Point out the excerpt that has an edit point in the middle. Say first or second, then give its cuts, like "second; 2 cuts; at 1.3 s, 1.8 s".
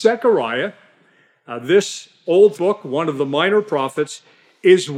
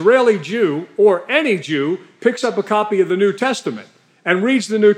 first; 1 cut; at 2.5 s